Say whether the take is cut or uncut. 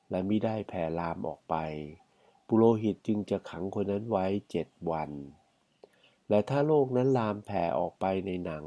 uncut